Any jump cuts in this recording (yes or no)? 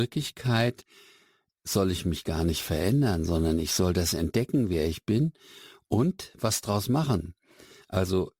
no